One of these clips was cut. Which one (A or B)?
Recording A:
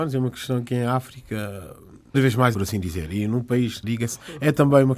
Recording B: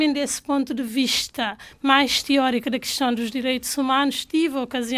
A